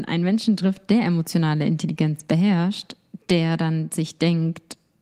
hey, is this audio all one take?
yes; 0 cuts

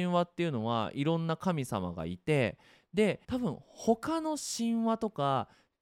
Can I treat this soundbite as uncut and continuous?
no; 1 cut; at 3.2 s

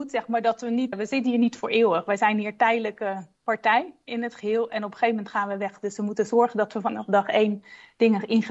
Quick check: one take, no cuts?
no; 1 cut; at 0.9 s

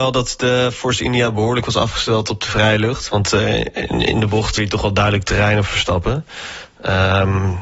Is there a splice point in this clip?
yes; 1 cut; at 4.6 s

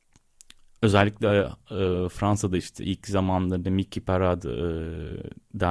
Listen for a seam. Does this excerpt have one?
no; 0 cuts

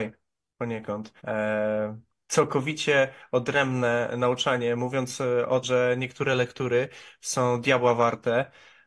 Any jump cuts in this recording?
yes; 2 cuts; at 1.2 s, 5.6 s

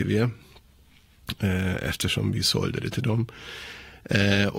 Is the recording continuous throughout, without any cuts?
yes; 0 cuts

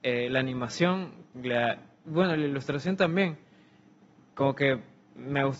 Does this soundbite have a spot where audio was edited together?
no; 0 cuts

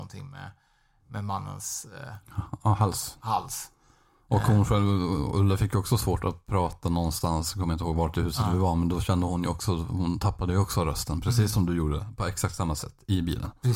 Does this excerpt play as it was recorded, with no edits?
yes; 0 cuts

